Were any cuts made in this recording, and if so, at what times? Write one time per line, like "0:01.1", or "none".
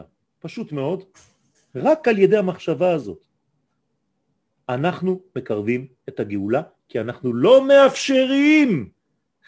none